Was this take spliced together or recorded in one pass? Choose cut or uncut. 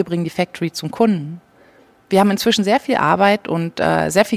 uncut